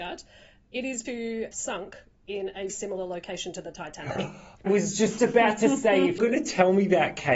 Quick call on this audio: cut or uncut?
cut